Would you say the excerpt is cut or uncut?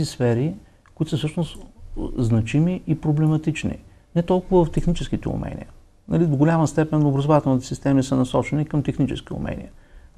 uncut